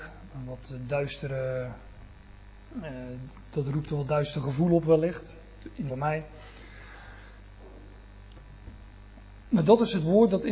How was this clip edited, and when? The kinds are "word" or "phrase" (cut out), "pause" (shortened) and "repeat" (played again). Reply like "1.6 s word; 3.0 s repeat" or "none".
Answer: 5.9 s phrase